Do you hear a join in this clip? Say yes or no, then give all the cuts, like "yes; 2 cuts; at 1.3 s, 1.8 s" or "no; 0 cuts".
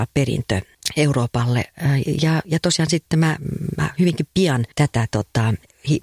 yes; 1 cut; at 4.7 s